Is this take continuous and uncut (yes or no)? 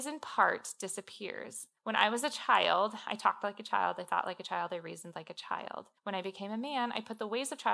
no